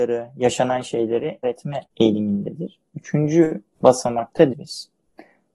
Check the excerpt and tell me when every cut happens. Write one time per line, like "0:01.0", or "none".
0:01.4
0:01.9
0:04.5